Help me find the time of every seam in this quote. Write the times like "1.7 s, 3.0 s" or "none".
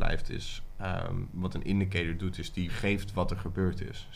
2.7 s